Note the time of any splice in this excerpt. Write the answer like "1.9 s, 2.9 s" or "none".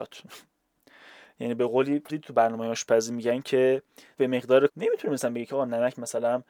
2.1 s, 4.2 s, 4.7 s

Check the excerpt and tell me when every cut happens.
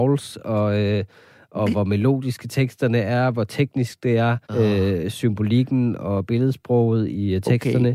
4.4 s

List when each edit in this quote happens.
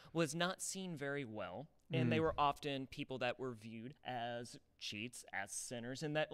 4.0 s

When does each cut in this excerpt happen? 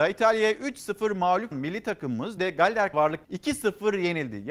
1.5 s, 2.4 s, 2.9 s, 3.2 s

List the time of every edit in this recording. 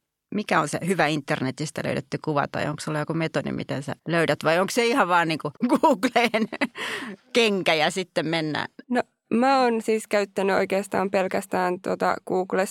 4.0 s, 5.6 s, 8.8 s

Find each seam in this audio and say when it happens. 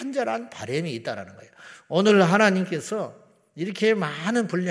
none

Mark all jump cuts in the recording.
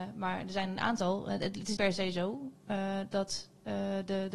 1.8 s

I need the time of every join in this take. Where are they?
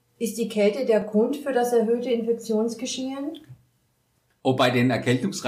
none

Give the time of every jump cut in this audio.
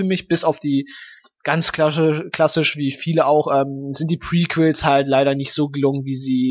none

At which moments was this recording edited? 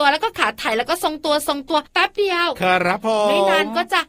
1.9 s

